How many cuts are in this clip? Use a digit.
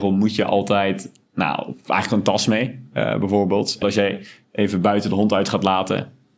1